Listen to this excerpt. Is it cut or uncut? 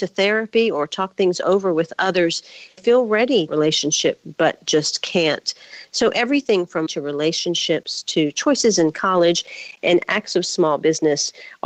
cut